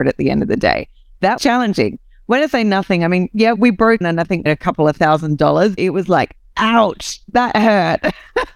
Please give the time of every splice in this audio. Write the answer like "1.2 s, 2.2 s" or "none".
1.4 s, 3.6 s, 4.0 s, 4.5 s, 5.8 s